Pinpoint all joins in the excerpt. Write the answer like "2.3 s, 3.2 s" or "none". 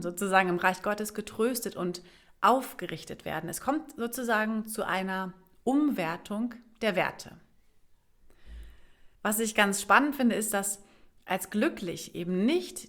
9.2 s